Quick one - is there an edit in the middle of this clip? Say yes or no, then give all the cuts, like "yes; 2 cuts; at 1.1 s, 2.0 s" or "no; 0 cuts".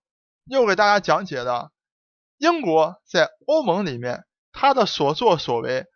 no; 0 cuts